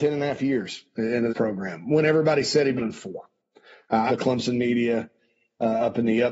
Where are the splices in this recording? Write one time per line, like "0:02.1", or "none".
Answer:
0:01.3
0:02.8
0:04.1